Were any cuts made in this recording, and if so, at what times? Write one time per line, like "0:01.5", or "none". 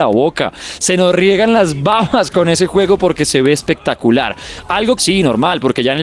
0:05.0

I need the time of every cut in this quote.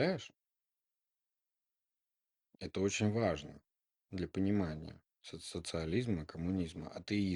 none

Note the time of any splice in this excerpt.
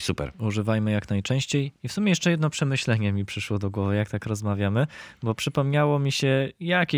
none

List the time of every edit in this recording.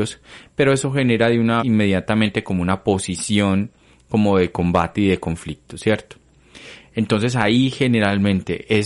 0:01.6

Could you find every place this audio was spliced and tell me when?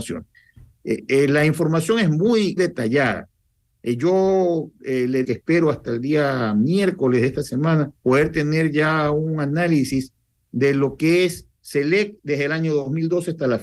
0:02.6
0:05.2
0:08.0
0:11.5

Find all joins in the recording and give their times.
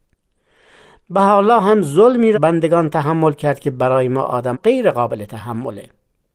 0:02.3
0:04.5

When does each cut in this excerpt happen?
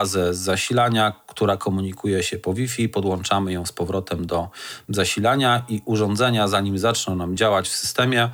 none

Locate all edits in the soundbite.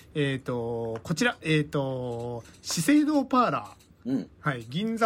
0:03.9

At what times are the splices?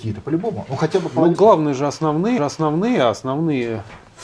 0:01.3
0:02.4

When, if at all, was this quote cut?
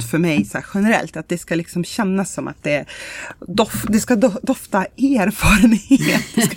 none

